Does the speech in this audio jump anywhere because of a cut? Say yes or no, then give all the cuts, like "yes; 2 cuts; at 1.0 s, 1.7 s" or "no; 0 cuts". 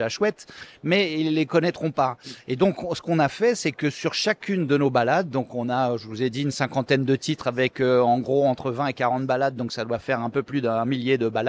no; 0 cuts